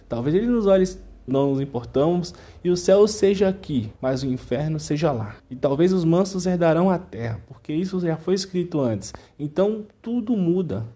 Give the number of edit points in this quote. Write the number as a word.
three